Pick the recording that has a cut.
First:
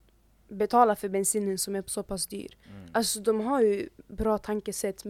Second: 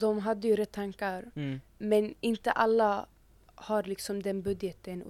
first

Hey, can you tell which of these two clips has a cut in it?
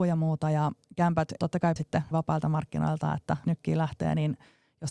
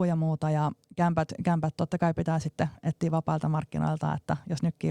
first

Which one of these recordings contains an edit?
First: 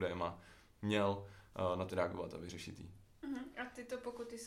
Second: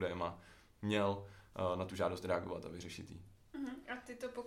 first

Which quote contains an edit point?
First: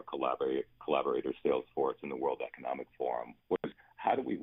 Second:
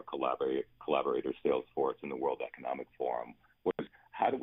first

